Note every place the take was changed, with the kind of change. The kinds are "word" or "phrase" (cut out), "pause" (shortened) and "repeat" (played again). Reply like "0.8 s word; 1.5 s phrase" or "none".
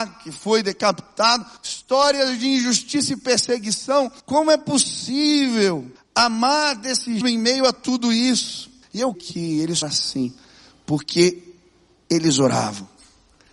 1.6 s pause; 4.2 s pause; 6.0 s pause; 7.2 s phrase; 8.8 s pause; 9.1 s word; 9.8 s phrase

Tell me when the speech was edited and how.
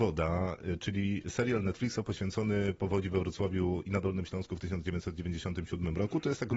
none

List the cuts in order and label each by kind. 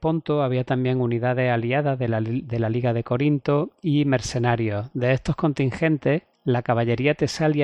6.3 s pause

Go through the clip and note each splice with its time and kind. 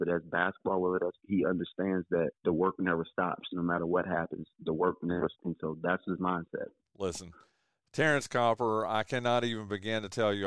1.2 s word; 2.4 s pause; 4.5 s pause; 5.3 s word; 6.8 s pause

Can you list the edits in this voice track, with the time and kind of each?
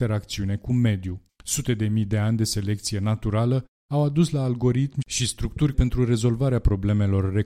1.3 s pause; 5.7 s word

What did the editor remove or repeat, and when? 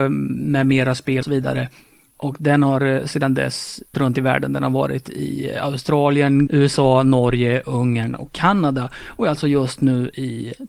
1.2 s word; 3.9 s word; 6.5 s word

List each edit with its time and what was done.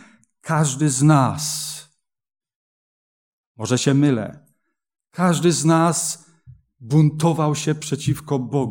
none

